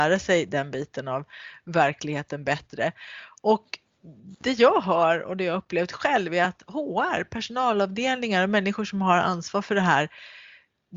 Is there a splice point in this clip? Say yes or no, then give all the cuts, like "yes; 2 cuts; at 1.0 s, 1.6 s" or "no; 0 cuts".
no; 0 cuts